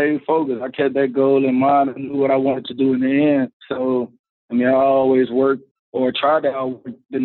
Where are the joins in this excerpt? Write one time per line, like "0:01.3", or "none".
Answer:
none